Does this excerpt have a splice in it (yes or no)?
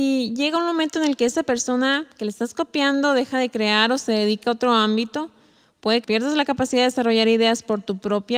yes